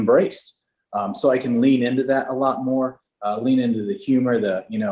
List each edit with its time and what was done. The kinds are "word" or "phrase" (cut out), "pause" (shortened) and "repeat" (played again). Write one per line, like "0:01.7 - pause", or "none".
none